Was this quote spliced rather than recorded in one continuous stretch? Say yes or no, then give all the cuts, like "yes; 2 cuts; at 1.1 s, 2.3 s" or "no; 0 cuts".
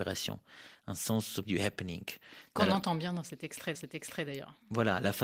yes; 2 cuts; at 1.4 s, 3.7 s